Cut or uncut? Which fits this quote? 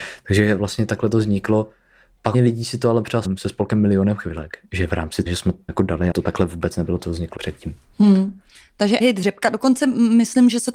cut